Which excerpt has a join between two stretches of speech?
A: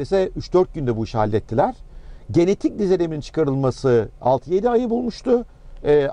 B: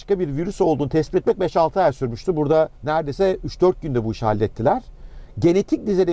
B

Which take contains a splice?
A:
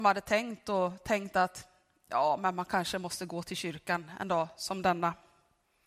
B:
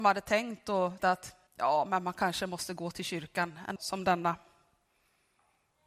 B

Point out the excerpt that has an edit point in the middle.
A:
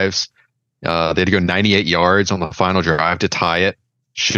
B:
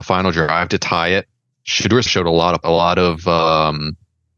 B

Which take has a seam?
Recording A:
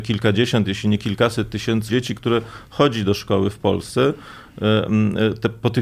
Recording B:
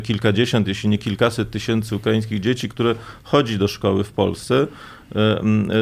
A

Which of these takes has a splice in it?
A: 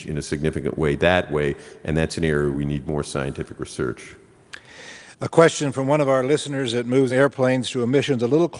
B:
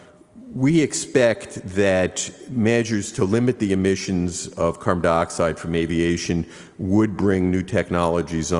A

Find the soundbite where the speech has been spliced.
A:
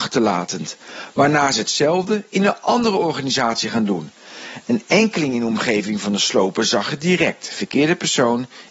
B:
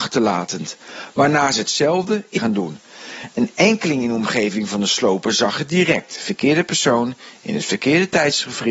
B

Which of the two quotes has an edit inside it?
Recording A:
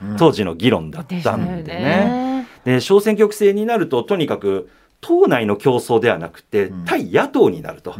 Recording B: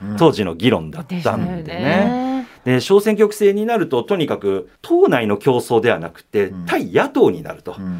B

